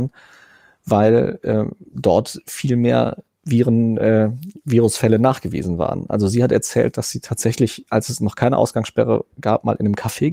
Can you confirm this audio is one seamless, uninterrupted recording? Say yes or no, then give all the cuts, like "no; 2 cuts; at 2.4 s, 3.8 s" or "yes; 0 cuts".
yes; 0 cuts